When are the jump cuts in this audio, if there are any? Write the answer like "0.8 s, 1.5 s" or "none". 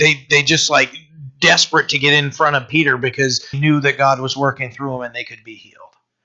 3.5 s

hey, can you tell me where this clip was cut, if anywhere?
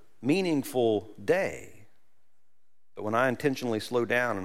none

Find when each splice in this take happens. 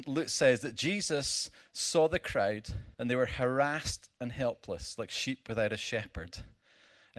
2.9 s

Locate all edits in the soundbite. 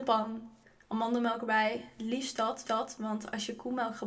2.6 s

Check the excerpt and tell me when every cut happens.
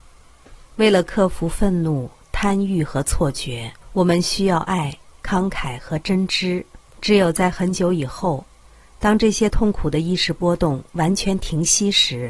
3.8 s, 6.9 s

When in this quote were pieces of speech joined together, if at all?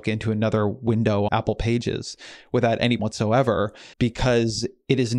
1.3 s, 3.0 s, 3.9 s

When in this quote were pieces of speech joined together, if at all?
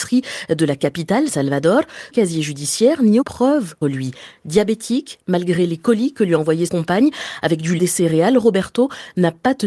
1.3 s, 2.1 s, 3.2 s, 3.8 s, 6.7 s, 7.8 s

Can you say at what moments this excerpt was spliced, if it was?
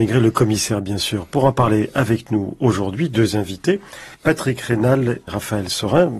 4.1 s, 5.3 s

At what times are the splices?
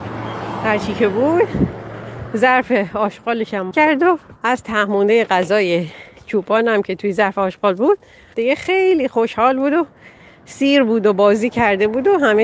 3.7 s, 4.4 s, 8.3 s

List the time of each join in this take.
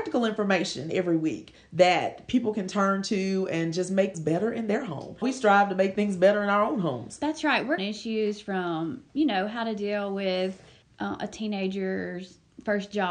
4.1 s, 5.2 s, 7.8 s, 9.1 s, 10.8 s

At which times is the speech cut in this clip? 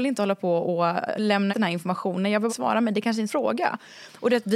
1.5 s, 2.5 s, 3.3 s

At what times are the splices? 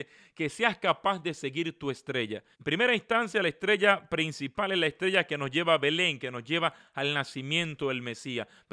2.5 s

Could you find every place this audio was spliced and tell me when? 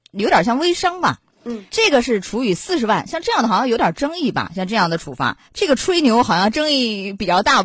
1.7 s, 5.5 s

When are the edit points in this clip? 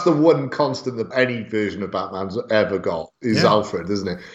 1.1 s

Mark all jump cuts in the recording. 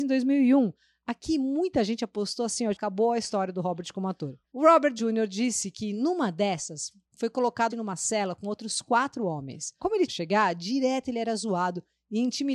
2.7 s, 5.0 s, 7.7 s, 10.1 s

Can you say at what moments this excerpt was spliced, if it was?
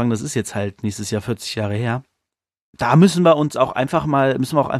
none

